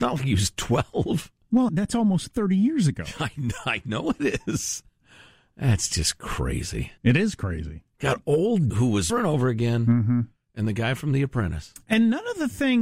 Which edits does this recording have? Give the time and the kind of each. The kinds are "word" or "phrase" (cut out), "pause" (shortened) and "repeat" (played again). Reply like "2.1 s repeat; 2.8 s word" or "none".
1.7 s word; 7.0 s pause; 7.9 s pause; 8.7 s phrase; 9.1 s phrase